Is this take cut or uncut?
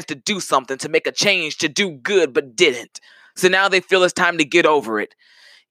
uncut